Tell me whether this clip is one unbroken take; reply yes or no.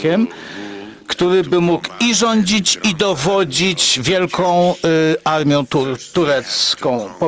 yes